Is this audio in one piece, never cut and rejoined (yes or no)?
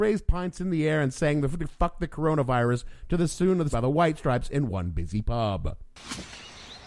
no